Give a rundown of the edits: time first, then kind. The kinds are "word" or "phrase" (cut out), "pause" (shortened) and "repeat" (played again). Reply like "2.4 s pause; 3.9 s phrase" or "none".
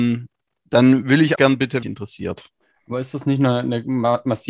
1.4 s word; 1.8 s phrase